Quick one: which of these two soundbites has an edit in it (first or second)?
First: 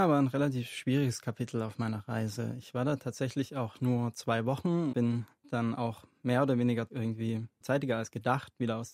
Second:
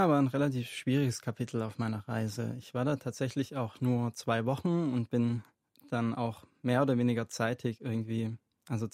first